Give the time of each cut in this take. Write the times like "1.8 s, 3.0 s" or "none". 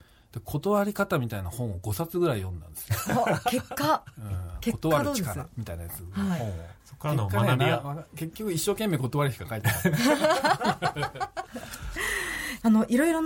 6.8 s